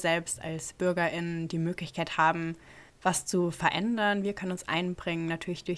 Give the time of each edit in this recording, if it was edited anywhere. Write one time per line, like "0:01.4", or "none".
0:02.9